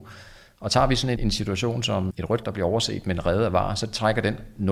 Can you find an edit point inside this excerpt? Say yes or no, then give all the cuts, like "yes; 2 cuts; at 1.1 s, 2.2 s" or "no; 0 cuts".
yes; 3 cuts; at 1.2 s, 2.1 s, 2.4 s